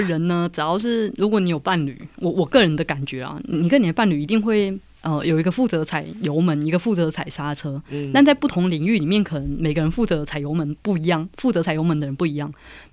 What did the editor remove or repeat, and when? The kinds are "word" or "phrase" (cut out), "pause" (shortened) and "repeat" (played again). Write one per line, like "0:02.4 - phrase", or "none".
0:11.3 - pause